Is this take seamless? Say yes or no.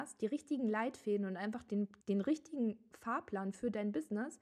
no